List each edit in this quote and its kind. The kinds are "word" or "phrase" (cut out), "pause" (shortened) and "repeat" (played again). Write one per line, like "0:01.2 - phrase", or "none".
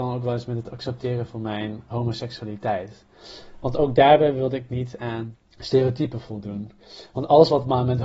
0:01.9 - word